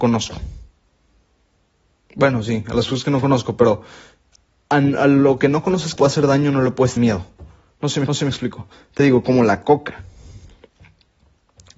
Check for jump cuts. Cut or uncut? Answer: cut